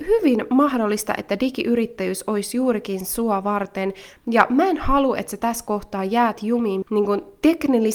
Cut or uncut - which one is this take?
cut